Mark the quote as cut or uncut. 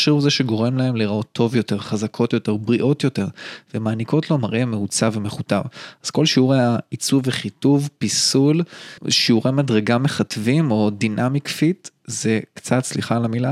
cut